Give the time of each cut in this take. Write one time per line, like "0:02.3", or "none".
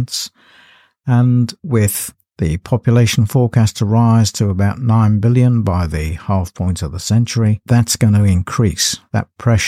0:07.6